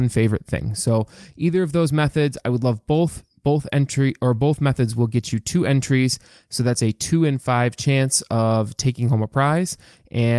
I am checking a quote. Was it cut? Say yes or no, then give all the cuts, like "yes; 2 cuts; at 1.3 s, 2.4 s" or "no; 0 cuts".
no; 0 cuts